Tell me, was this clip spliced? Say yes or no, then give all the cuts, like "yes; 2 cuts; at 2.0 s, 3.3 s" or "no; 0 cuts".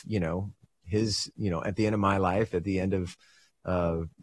no; 0 cuts